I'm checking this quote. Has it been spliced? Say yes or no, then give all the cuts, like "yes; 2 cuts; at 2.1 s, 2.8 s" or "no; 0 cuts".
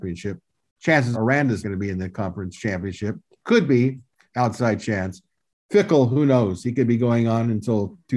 yes; 3 cuts; at 1.1 s, 1.6 s, 4.3 s